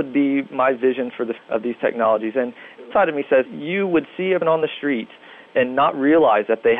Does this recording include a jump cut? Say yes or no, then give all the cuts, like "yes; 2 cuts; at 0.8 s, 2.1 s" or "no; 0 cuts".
yes; 4 cuts; at 1.4 s, 2.9 s, 3.4 s, 4.4 s